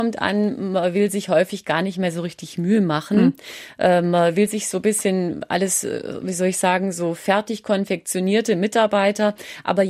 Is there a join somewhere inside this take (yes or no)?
no